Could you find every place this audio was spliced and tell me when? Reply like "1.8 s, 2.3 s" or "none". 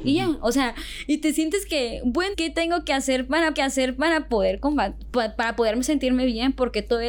2.3 s, 3.5 s